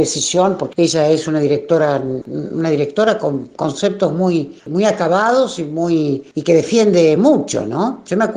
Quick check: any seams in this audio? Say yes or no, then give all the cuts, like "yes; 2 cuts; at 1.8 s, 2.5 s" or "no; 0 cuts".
no; 0 cuts